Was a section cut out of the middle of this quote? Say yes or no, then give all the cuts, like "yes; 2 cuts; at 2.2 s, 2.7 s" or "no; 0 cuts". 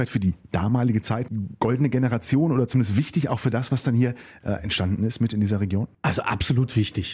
no; 0 cuts